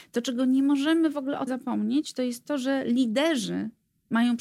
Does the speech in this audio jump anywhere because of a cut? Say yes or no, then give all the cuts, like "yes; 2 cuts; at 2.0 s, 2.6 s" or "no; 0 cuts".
yes; 1 cut; at 1.5 s